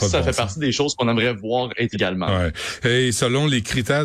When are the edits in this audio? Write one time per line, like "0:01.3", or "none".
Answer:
0:01.9